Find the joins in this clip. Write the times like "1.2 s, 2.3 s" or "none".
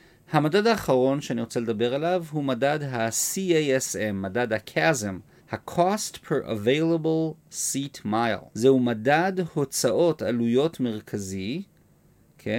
5.4 s, 8.5 s